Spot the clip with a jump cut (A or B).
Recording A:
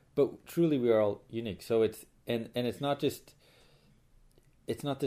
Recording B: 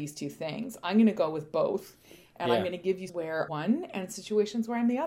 B